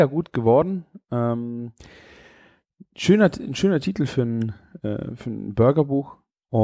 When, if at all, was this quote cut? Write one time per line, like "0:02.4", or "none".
none